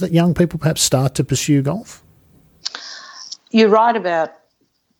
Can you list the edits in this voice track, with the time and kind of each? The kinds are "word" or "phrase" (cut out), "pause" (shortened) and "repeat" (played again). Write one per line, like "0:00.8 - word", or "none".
0:03.4 - pause